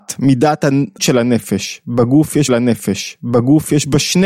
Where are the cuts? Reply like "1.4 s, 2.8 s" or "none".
1.0 s, 2.5 s